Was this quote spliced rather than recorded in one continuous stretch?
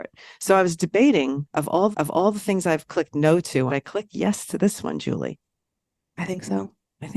yes; 3 cuts; at 1.9 s, 3.7 s, 5.6 s

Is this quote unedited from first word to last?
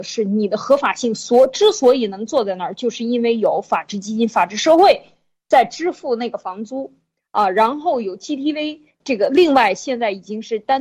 no; 1 cut; at 9.0 s

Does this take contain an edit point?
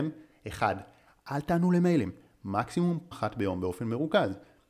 yes; 1 cut; at 3.1 s

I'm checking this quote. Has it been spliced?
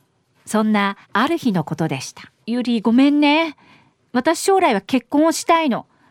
yes; 2 cuts; at 1.0 s, 2.4 s

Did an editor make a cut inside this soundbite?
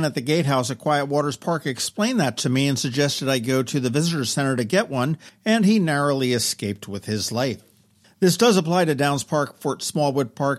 no; 0 cuts

